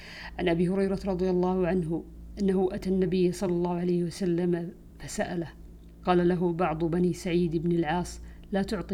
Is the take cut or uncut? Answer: uncut